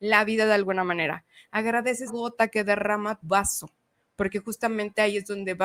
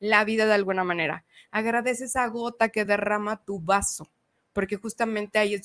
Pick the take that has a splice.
first; 2 cuts; at 2.1 s, 3.2 s

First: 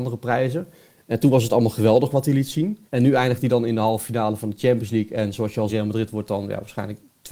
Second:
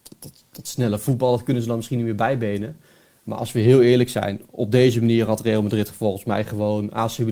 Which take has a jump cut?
first; 2 cuts; at 2.9 s, 5.7 s

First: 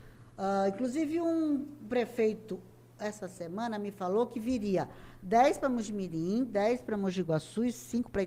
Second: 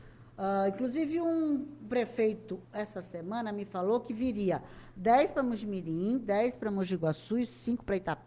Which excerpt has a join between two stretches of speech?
second; 1 cut; at 2.6 s

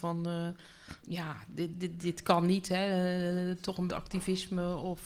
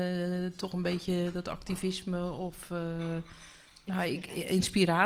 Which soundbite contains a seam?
first; 3 cuts; at 1.0 s, 2.0 s, 3.9 s

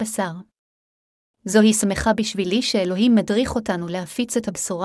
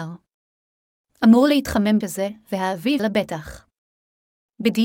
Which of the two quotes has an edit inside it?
second; 2 cuts; at 2.0 s, 3.0 s

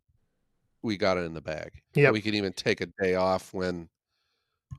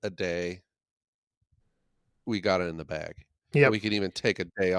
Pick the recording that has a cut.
first; 1 cut; at 1.8 s

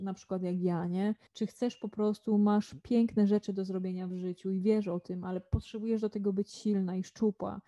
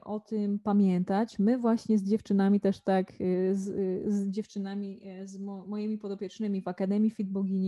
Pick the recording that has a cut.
first; 1 cut; at 1.3 s

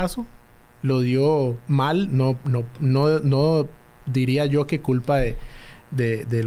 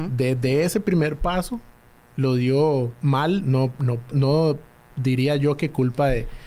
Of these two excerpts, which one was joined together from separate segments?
second; 1 cut; at 4.1 s

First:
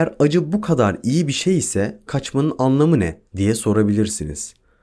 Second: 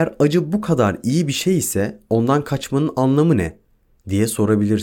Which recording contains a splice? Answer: first; 2 cuts; at 2.1 s, 3.3 s

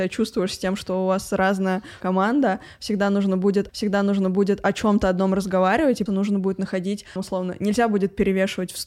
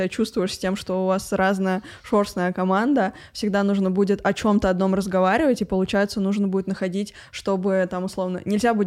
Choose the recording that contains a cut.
first; 4 cuts; at 2.0 s, 3.7 s, 6.1 s, 7.2 s

